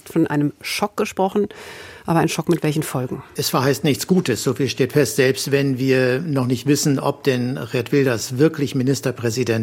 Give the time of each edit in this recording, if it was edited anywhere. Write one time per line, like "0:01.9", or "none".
none

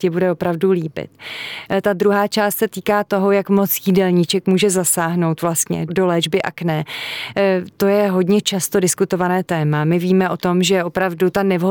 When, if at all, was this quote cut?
0:05.9

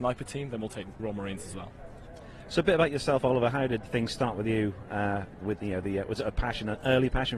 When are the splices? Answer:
0:01.0
0:03.8
0:05.6

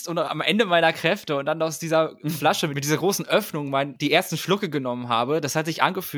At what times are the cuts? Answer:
none

